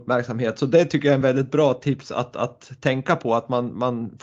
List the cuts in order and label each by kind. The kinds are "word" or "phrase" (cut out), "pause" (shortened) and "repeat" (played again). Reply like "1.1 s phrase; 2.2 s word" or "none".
none